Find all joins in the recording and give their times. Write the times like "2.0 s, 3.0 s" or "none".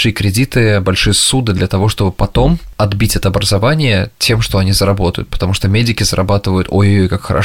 4.1 s

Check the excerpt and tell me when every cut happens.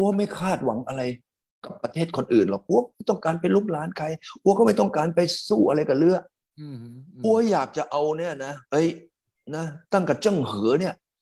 8.7 s

